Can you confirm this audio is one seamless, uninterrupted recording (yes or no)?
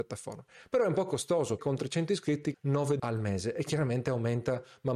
no